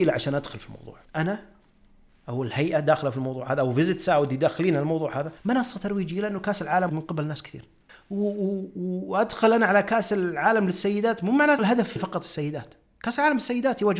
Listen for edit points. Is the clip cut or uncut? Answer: cut